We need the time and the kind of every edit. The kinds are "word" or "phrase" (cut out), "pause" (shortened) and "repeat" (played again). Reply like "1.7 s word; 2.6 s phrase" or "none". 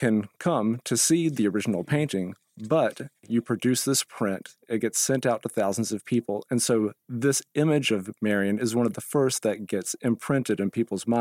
none